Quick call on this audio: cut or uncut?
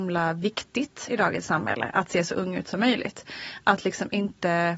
uncut